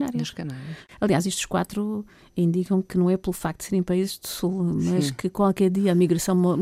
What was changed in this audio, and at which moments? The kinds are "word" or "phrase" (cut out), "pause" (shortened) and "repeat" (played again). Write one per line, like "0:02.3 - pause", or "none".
none